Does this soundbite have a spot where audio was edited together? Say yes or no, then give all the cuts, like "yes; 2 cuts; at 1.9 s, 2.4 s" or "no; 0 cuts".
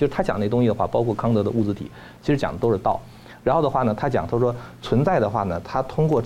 no; 0 cuts